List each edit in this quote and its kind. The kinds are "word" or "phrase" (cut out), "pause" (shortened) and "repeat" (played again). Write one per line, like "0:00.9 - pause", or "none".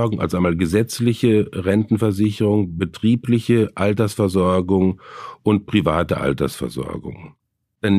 none